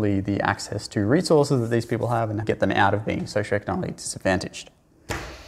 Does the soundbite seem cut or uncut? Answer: cut